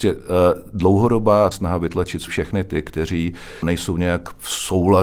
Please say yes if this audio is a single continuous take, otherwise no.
no